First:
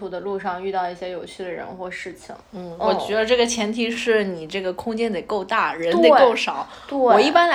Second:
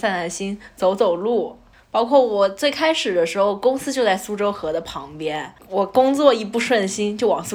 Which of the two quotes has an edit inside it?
first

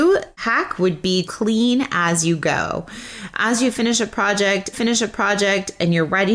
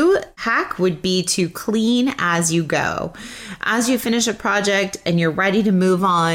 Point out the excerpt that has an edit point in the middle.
first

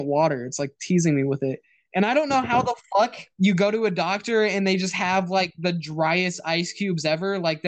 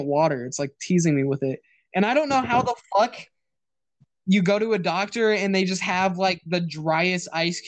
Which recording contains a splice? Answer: first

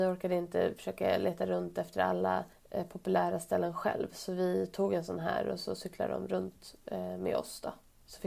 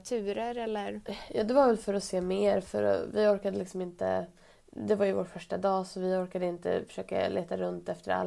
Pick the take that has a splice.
first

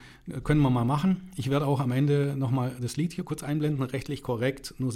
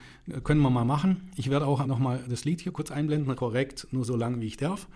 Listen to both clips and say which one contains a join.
second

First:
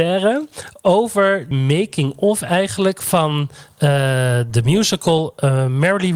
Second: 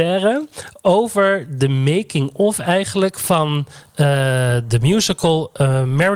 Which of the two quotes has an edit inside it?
first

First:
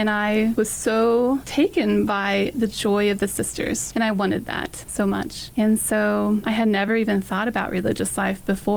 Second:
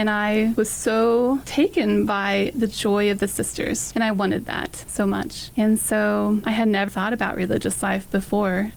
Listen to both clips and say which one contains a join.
second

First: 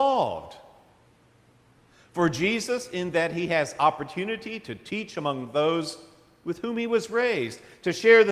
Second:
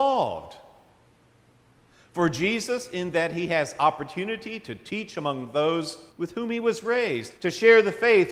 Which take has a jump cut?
second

